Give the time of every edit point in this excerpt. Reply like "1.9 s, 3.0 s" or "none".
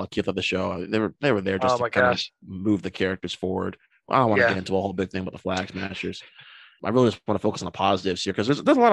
none